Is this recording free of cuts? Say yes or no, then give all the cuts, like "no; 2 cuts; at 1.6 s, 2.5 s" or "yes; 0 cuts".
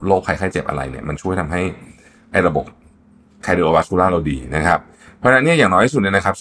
yes; 0 cuts